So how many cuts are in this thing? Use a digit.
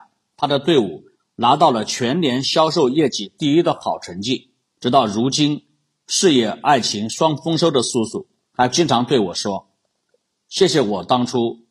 2